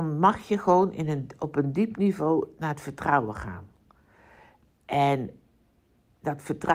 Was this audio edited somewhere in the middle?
no; 0 cuts

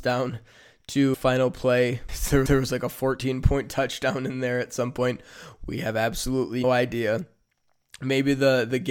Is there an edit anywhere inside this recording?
yes; 4 cuts; at 1.1 s, 2.1 s, 2.5 s, 6.6 s

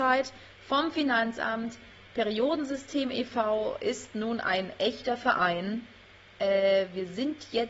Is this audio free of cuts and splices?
yes; 0 cuts

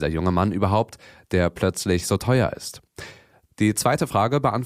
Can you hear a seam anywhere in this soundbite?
no; 0 cuts

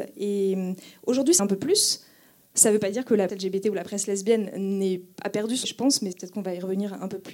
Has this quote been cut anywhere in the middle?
yes; 4 cuts; at 1.4 s, 3.3 s, 5.6 s, 6.1 s

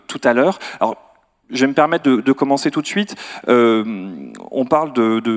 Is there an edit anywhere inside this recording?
no; 0 cuts

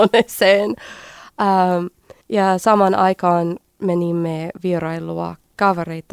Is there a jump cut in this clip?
yes; 2 cuts; at 2.2 s, 3.6 s

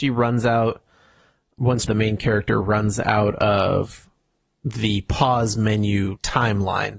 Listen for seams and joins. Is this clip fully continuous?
no; 1 cut; at 1.8 s

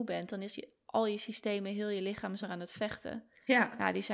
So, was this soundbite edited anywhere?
yes; 1 cut; at 2.4 s

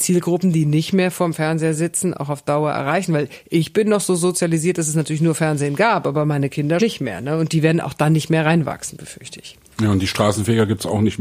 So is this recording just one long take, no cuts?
no; 1 cut; at 6.8 s

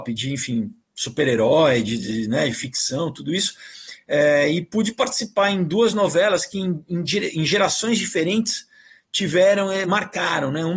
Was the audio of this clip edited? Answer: no; 0 cuts

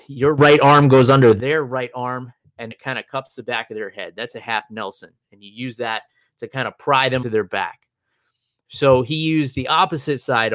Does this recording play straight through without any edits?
no; 2 cuts; at 2.7 s, 7.2 s

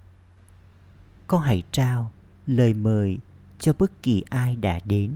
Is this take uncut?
yes; 0 cuts

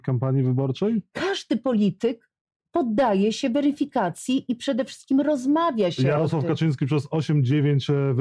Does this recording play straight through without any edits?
yes; 0 cuts

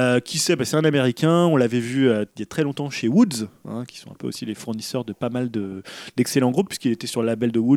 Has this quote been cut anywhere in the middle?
no; 0 cuts

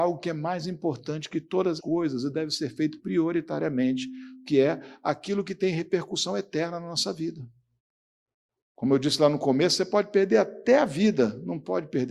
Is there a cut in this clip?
yes; 2 cuts; at 1.8 s, 7.8 s

